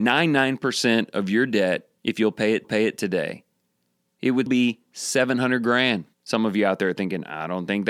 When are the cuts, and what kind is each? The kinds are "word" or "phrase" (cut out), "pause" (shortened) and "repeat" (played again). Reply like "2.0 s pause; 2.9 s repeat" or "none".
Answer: 2.0 s pause; 2.6 s repeat; 4.5 s word; 6.1 s pause